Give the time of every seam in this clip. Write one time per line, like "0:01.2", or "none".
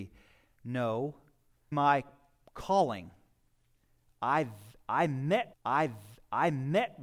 0:01.7
0:05.5